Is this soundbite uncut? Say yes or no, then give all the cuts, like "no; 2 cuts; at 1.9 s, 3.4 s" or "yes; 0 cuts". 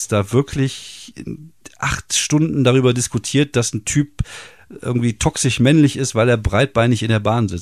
yes; 0 cuts